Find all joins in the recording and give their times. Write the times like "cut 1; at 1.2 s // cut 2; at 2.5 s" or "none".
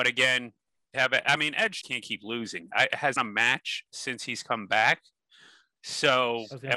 cut 1; at 0.9 s // cut 2; at 1.8 s // cut 3; at 3.2 s

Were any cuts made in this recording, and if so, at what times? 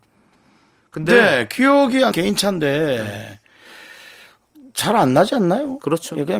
cut 1; at 2.1 s

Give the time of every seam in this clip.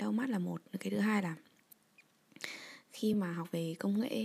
none

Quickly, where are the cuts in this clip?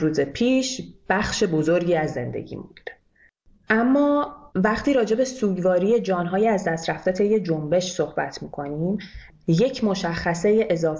cut 1; at 4.5 s

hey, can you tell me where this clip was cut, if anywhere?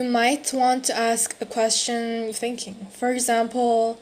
cut 1; at 2.3 s

